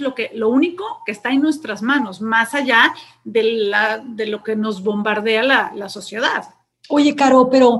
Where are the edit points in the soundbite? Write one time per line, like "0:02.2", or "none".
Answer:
none